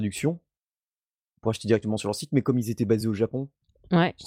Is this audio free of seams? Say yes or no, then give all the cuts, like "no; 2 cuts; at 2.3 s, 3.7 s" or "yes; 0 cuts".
yes; 0 cuts